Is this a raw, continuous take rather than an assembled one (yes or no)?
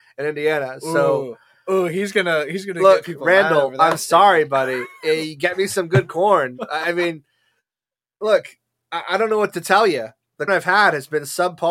no